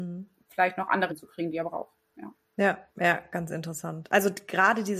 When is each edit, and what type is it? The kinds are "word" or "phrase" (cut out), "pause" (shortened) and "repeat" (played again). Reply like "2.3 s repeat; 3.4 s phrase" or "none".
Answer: 1.1 s word; 2.9 s pause